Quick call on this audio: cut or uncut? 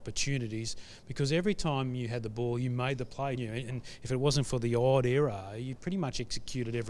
cut